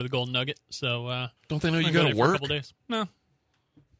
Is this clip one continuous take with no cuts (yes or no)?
no